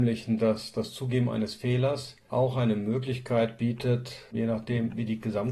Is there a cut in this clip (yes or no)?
no